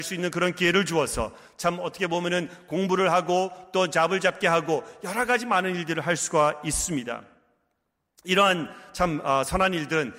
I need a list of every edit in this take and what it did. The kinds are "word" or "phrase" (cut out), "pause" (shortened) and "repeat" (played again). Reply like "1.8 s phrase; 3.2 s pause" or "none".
none

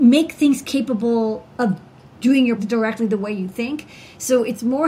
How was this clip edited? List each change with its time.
2.6 s phrase

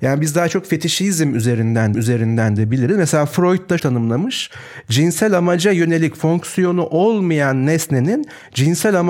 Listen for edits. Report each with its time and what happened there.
1.9 s repeat; 3.8 s word

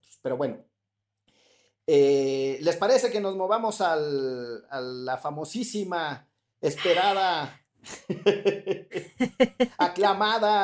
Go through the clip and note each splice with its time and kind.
none

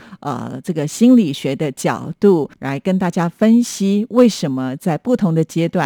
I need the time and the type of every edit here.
2.5 s pause

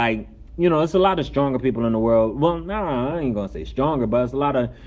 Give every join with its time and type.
none

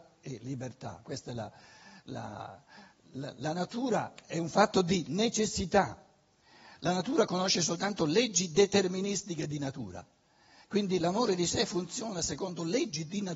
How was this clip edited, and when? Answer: none

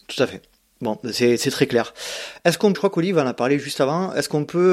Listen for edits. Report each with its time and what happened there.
2.7 s word

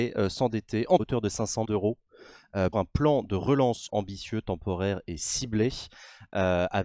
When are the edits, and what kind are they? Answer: 1.0 s phrase; 1.6 s word; 2.7 s word; 3.9 s word

